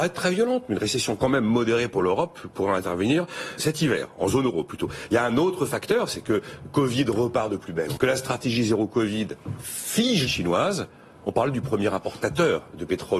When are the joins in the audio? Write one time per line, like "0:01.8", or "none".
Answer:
0:03.6
0:08.0
0:10.3